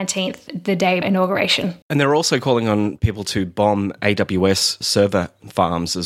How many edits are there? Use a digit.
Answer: 3